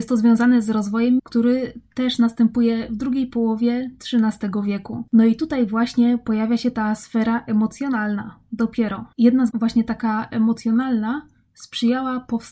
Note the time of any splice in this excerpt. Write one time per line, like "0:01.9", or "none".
0:01.2
0:05.1
0:09.1
0:09.5